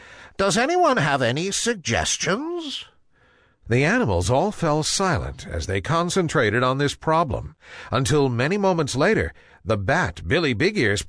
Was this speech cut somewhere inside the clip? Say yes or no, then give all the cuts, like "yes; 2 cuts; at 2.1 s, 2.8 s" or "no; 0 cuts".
no; 0 cuts